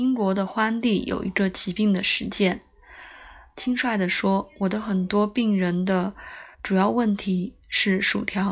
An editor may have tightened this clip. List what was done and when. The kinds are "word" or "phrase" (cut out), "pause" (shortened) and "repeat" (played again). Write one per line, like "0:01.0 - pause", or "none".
0:06.5 - pause